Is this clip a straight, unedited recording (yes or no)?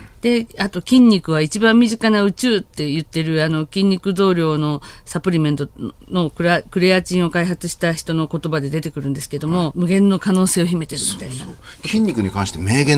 no